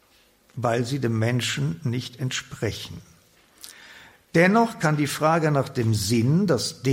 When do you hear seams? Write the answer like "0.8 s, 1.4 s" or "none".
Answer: none

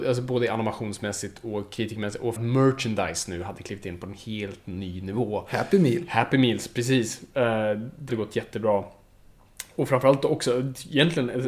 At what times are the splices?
2.4 s, 8.1 s

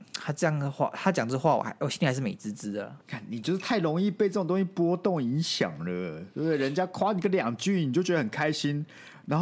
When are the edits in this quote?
3.0 s

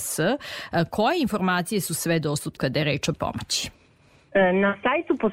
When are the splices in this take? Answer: 2.6 s, 3.1 s

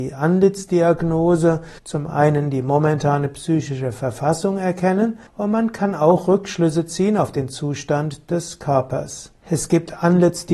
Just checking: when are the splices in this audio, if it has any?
1.8 s, 5.3 s, 9.4 s

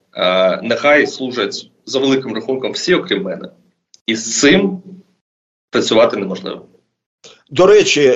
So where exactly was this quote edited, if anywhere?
none

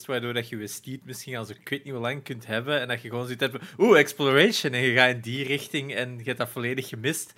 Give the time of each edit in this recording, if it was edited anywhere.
none

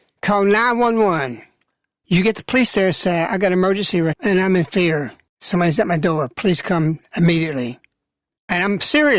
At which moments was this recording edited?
4.1 s

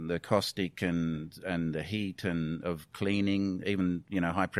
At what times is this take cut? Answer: 3.6 s

